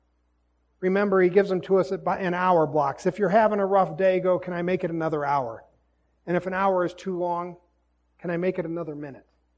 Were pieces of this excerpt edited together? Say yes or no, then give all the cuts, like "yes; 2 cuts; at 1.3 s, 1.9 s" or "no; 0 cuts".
no; 0 cuts